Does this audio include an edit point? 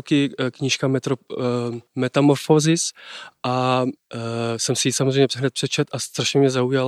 no; 0 cuts

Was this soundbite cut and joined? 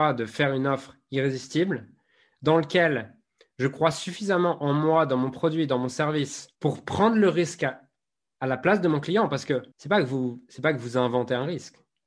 yes; 2 cuts; at 6.5 s, 9.7 s

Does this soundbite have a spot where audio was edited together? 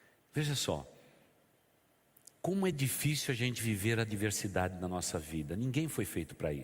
no; 0 cuts

